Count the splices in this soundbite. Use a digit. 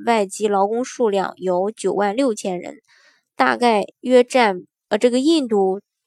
1